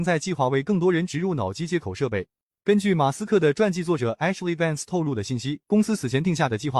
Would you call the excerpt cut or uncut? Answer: cut